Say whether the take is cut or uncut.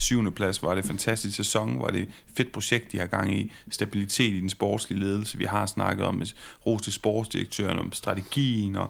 uncut